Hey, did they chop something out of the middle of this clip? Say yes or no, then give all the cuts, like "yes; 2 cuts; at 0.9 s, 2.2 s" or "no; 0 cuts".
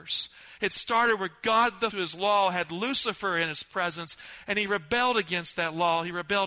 yes; 1 cut; at 1.9 s